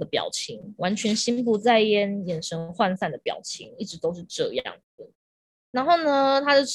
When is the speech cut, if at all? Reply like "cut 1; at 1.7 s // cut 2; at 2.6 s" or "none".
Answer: none

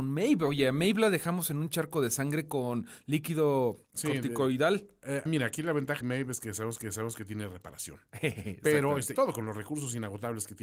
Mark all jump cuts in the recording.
cut 1; at 3.8 s // cut 2; at 5.3 s // cut 3; at 6.0 s // cut 4; at 6.8 s // cut 5; at 9.1 s

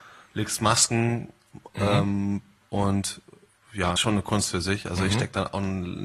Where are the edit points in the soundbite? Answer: cut 1; at 2.6 s // cut 2; at 4.0 s

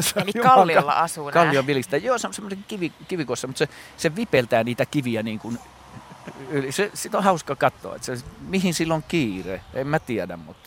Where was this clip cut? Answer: none

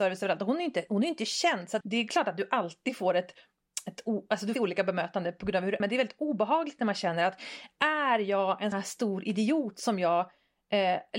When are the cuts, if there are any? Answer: cut 1; at 1.8 s // cut 2; at 4.6 s // cut 3; at 5.8 s // cut 4; at 8.7 s

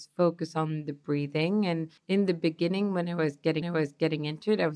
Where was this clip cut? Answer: cut 1; at 2.0 s // cut 2; at 3.6 s

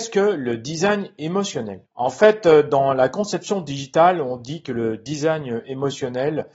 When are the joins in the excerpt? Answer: cut 1; at 1.9 s

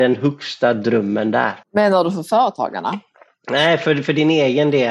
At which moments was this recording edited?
cut 1; at 1.6 s

